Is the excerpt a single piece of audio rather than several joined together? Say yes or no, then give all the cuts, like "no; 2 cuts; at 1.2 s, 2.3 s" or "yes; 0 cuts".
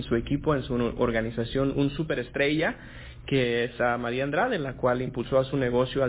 yes; 0 cuts